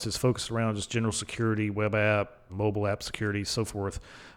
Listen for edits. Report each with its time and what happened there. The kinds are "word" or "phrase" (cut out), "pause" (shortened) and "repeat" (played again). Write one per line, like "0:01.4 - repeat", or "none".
0:02.5 - word